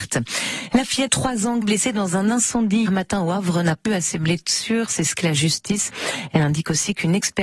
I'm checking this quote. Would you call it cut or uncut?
cut